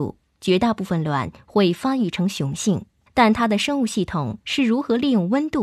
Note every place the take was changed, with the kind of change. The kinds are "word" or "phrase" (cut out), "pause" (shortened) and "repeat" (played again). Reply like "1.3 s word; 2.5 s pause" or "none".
3.1 s pause